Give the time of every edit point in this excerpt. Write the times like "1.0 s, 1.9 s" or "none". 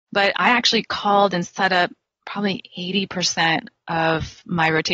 none